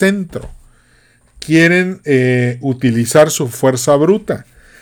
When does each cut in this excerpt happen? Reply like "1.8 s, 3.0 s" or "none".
none